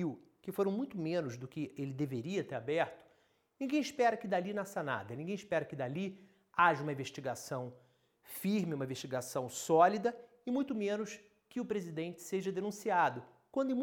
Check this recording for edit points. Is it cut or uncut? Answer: uncut